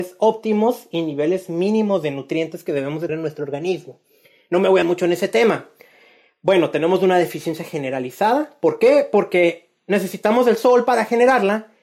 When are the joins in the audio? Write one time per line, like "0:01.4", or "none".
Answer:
0:03.1
0:04.8